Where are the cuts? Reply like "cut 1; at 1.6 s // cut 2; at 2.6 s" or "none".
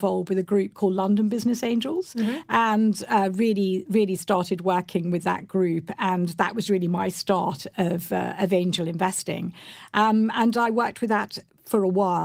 none